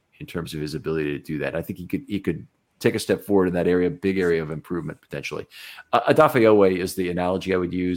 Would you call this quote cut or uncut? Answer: uncut